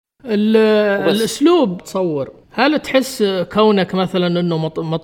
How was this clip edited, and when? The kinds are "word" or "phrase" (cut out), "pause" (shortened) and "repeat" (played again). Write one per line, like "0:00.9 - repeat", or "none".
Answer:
0:01.8 - phrase
0:02.4 - pause